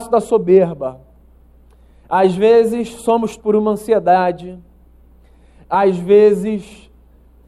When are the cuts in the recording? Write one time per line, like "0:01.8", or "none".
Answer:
0:03.4